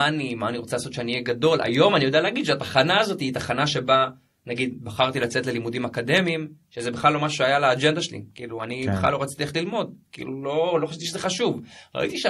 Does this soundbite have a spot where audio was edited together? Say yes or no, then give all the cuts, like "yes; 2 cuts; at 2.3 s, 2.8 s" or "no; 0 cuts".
no; 0 cuts